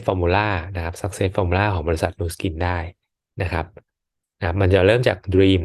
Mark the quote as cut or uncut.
uncut